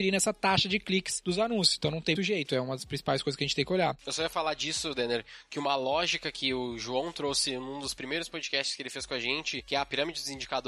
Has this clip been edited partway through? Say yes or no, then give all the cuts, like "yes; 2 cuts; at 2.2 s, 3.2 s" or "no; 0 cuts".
yes; 1 cut; at 2.2 s